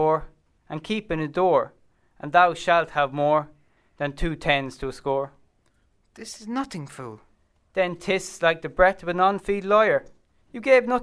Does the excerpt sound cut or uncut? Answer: uncut